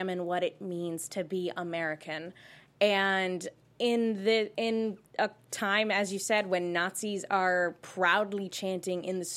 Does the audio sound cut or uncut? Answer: uncut